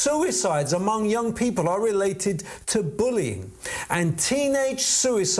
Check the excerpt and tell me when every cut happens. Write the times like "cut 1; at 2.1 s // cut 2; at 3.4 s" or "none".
none